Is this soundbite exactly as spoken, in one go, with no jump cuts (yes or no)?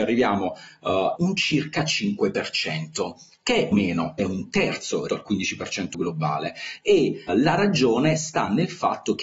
no